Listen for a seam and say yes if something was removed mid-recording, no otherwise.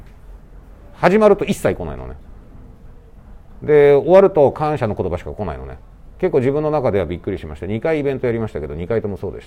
yes